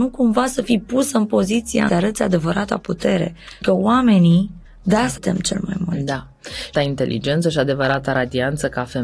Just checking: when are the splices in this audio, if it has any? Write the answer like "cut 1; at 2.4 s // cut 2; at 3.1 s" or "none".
cut 1; at 1.9 s // cut 2; at 3.6 s // cut 3; at 4.7 s // cut 4; at 5.2 s // cut 5; at 6.7 s

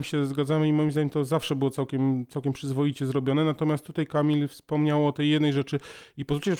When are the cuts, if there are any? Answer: none

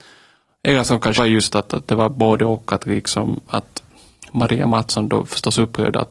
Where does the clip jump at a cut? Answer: cut 1; at 1.2 s // cut 2; at 3.5 s

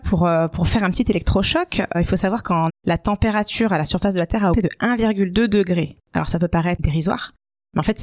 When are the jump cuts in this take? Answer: cut 1; at 1.9 s // cut 2; at 2.7 s // cut 3; at 4.5 s

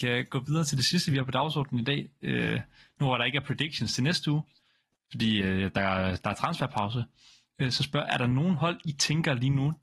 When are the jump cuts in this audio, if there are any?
none

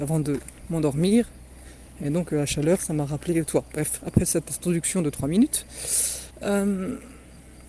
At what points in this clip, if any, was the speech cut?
cut 1; at 6.3 s

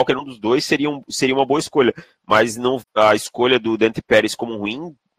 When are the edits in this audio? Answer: cut 1; at 2.8 s

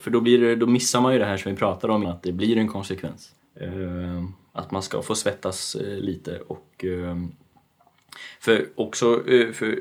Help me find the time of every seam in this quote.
cut 1; at 2.0 s // cut 2; at 3.4 s

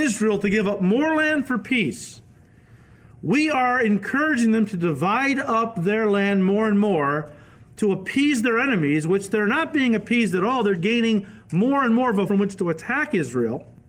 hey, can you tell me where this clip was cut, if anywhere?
cut 1; at 10.7 s // cut 2; at 12.3 s

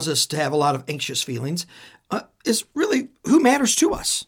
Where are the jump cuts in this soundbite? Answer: none

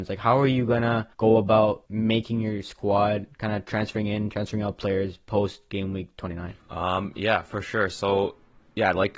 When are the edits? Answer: cut 1; at 1.1 s // cut 2; at 1.9 s // cut 3; at 6.6 s

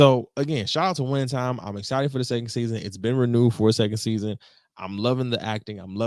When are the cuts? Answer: none

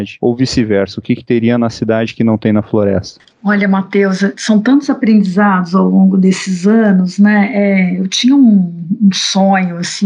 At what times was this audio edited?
none

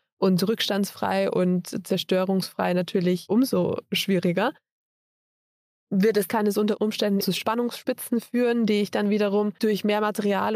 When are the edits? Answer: cut 1; at 6.3 s // cut 2; at 7.2 s

